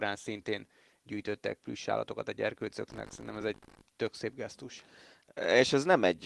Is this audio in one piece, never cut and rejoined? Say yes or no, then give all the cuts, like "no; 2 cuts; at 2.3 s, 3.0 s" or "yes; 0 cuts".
yes; 0 cuts